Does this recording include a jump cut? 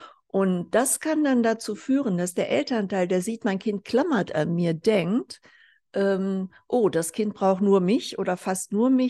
no; 0 cuts

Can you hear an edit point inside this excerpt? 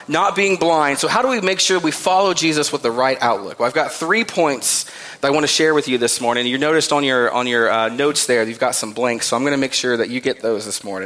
no; 0 cuts

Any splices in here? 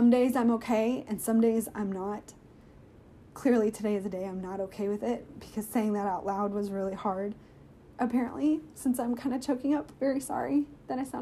yes; 1 cut; at 9.9 s

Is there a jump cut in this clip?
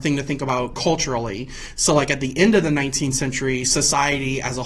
no; 0 cuts

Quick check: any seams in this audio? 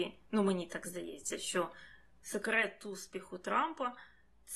no; 0 cuts

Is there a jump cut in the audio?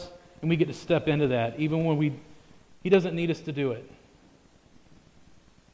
no; 0 cuts

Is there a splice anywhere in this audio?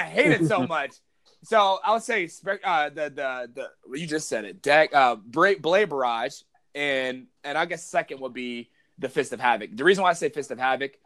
no; 0 cuts

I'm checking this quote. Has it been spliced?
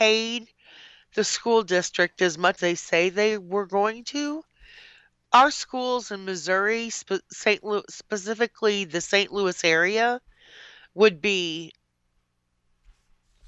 yes; 1 cut; at 2.6 s

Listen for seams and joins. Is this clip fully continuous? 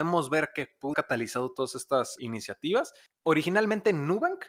no; 2 cuts; at 0.9 s, 2.2 s

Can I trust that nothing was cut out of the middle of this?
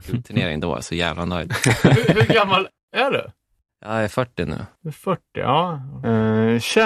yes; 0 cuts

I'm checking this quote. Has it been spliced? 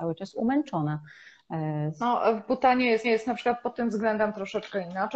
yes; 1 cut; at 3.0 s

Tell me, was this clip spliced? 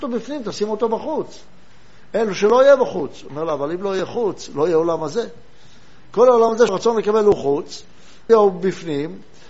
yes; 2 cuts; at 6.7 s, 8.3 s

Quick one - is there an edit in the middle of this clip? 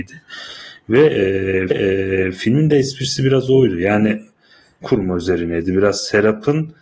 yes; 2 cuts; at 1.7 s, 4.8 s

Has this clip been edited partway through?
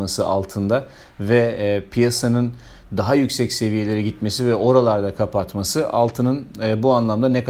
no; 0 cuts

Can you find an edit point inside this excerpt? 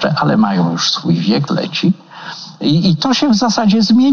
yes; 1 cut; at 1.5 s

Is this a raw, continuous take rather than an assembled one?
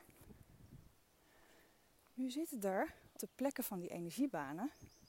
no; 1 cut; at 3.2 s

